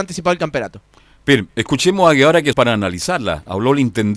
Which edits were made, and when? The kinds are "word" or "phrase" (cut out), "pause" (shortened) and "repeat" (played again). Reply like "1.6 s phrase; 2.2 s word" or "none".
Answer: 2.5 s word